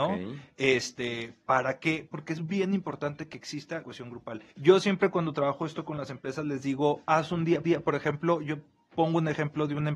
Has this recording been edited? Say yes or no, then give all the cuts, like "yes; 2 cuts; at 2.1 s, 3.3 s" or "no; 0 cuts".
yes; 3 cuts; at 3.8 s, 4.5 s, 7.6 s